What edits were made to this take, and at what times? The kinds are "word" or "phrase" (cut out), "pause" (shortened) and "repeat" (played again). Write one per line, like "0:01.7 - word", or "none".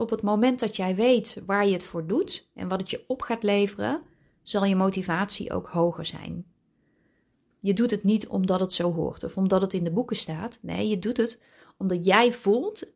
none